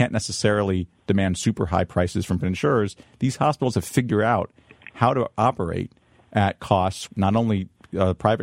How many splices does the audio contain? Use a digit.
2